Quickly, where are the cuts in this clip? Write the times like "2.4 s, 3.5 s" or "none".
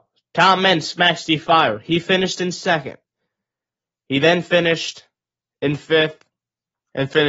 none